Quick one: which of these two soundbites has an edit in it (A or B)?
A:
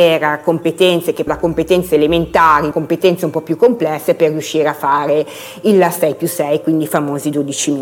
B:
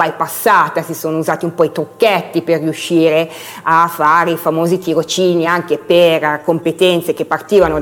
A